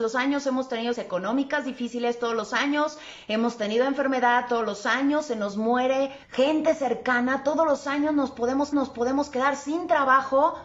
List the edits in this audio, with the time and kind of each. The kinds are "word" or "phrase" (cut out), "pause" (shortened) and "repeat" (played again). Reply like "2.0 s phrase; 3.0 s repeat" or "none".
0.9 s word; 6.2 s pause; 8.7 s repeat